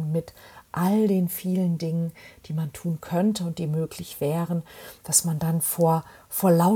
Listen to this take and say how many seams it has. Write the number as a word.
zero